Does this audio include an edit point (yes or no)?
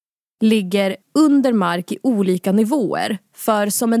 yes